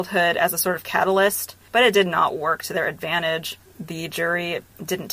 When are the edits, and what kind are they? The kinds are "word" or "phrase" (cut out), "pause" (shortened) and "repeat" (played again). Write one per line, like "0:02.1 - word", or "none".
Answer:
none